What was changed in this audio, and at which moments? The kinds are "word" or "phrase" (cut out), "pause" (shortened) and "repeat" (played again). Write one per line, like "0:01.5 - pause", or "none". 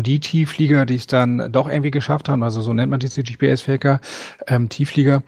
none